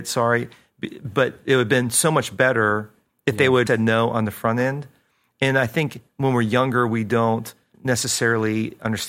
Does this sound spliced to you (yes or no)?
yes